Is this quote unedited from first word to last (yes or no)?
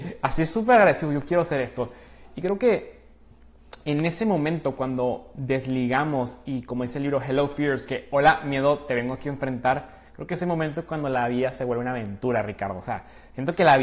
no